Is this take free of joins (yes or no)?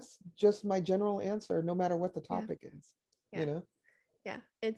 yes